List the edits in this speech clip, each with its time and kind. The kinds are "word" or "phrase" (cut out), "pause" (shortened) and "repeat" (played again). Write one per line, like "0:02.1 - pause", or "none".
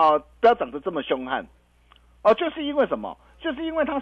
none